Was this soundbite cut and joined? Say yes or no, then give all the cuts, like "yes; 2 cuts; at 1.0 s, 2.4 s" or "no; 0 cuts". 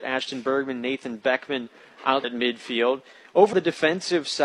yes; 2 cuts; at 2.2 s, 3.5 s